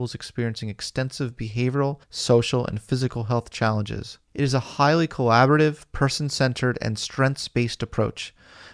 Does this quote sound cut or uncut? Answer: cut